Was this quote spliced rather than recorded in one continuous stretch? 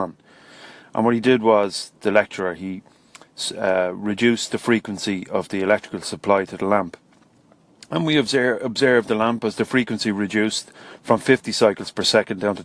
no; 0 cuts

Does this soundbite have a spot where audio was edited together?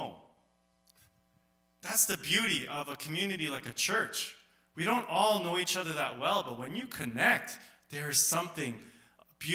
no; 0 cuts

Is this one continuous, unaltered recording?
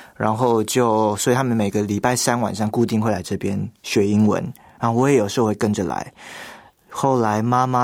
yes; 0 cuts

